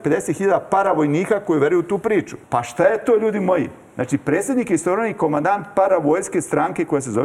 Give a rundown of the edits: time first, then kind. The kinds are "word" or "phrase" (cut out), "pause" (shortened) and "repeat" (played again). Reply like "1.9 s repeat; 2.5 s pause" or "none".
2.4 s pause